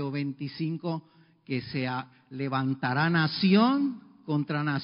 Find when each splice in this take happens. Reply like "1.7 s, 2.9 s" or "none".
none